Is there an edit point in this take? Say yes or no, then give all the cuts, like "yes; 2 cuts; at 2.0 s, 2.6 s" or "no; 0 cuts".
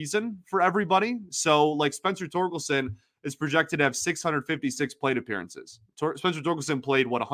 no; 0 cuts